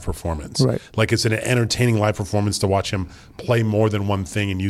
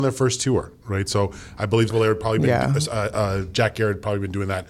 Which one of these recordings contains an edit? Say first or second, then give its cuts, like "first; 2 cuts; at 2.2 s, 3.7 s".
second; 1 cut; at 1.9 s